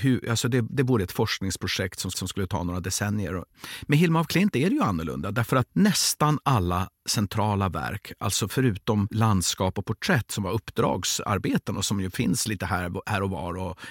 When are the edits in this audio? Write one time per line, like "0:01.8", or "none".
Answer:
0:02.1
0:05.7